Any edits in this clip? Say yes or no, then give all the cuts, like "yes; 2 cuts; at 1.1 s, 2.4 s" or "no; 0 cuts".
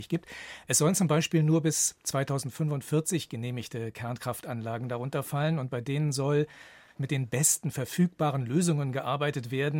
no; 0 cuts